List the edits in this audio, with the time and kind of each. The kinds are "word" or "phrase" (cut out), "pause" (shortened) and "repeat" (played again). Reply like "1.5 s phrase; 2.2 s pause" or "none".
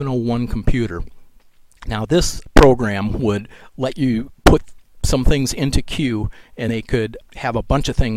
6.7 s word